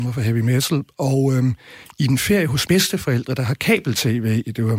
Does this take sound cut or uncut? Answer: cut